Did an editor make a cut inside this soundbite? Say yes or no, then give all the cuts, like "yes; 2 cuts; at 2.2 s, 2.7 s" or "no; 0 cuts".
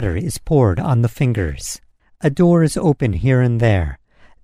no; 0 cuts